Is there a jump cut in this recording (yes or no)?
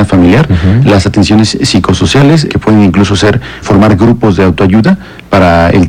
yes